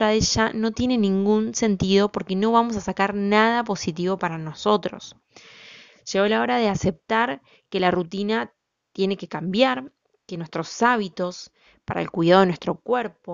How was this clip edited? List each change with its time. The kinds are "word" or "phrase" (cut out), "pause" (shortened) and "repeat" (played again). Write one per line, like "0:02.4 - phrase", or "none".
none